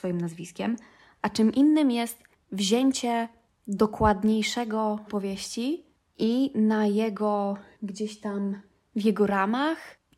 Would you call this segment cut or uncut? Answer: cut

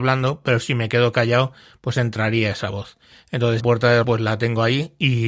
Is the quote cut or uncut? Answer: cut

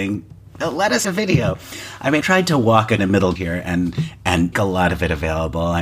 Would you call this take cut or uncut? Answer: cut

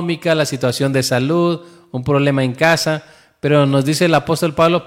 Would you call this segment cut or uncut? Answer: uncut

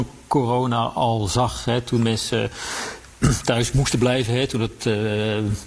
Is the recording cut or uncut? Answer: uncut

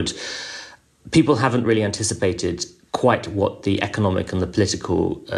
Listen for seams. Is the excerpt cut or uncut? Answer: uncut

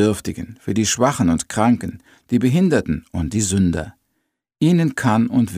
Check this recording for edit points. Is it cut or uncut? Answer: uncut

